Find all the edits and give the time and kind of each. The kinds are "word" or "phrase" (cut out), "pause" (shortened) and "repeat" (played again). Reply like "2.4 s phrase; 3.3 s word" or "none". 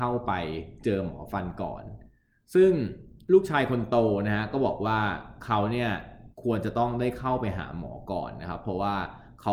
6.3 s pause